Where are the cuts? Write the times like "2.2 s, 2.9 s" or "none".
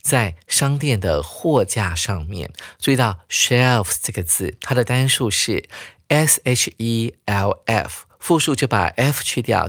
none

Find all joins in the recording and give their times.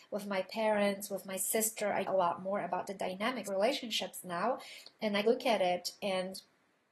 2.0 s, 3.4 s, 5.2 s

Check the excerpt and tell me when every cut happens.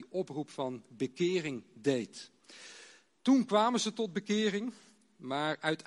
none

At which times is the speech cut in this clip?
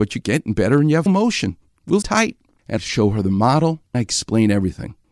1.1 s, 2.0 s, 2.8 s, 3.9 s

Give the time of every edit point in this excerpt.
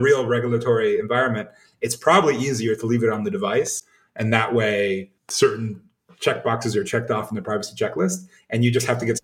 5.2 s

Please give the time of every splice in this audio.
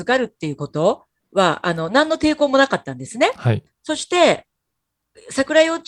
3.7 s

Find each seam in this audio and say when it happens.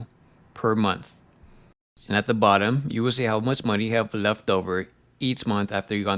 none

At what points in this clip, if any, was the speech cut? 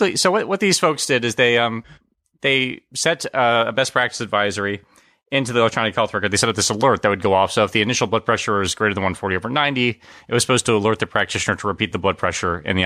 none

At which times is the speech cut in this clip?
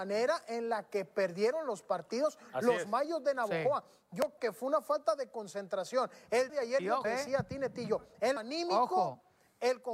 4.4 s, 6.5 s, 7.0 s, 8.4 s

